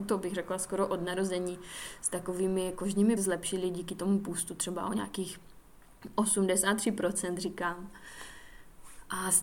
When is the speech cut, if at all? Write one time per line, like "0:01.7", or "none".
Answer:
0:03.2